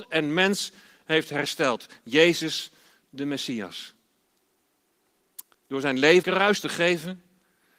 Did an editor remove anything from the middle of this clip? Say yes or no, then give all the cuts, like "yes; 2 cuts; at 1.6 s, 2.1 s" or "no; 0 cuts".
yes; 2 cuts; at 5.5 s, 6.2 s